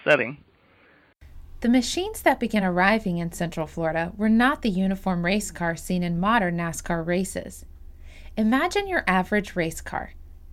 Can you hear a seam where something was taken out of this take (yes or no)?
no